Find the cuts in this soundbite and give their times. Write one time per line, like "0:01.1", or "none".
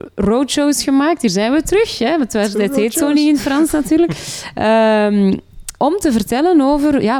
0:05.8